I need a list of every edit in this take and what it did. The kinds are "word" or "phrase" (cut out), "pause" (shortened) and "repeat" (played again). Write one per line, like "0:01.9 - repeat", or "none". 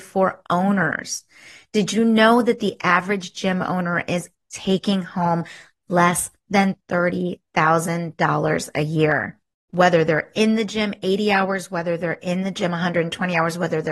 none